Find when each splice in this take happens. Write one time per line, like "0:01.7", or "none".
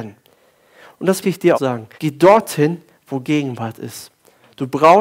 0:01.2
0:01.5
0:02.0
0:03.2